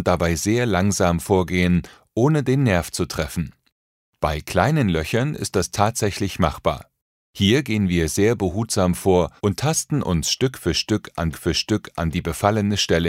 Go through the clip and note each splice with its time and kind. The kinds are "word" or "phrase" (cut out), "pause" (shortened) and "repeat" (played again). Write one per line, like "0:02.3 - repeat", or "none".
0:09.4 - pause
0:11.3 - repeat